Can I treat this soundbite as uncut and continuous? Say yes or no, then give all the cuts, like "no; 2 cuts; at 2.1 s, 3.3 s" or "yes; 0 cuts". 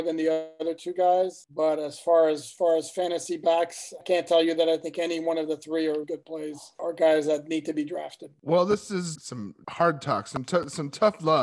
no; 3 cuts; at 4.0 s, 6.0 s, 9.1 s